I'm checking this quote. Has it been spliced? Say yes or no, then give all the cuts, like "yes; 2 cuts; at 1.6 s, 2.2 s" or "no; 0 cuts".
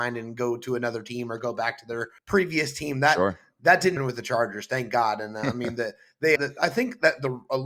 yes; 3 cuts; at 2.2 s, 4.0 s, 6.4 s